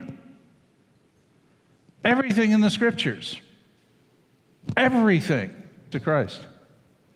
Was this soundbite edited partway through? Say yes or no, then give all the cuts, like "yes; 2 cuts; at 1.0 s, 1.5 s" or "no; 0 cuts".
yes; 1 cut; at 5.9 s